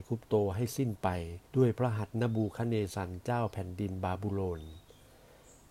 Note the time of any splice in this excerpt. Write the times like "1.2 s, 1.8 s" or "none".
1.5 s